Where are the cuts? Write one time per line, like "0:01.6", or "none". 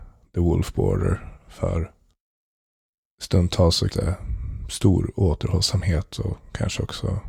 0:03.9